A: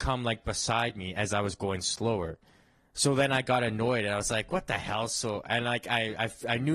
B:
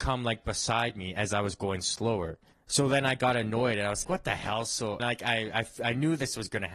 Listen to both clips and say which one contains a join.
B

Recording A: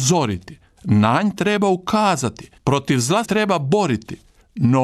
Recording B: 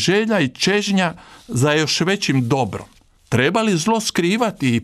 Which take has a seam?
A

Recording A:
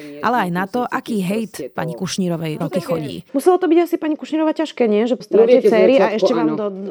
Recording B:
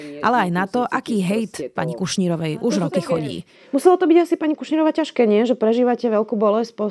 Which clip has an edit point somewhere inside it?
A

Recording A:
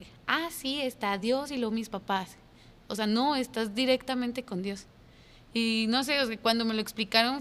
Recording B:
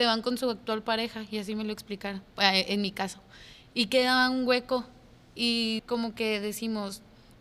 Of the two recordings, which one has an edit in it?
B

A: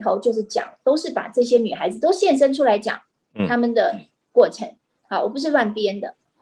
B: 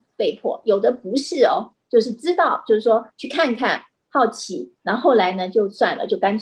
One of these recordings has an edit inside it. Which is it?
B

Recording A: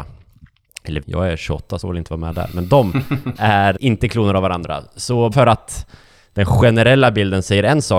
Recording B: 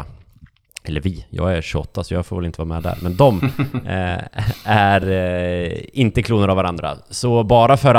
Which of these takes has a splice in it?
A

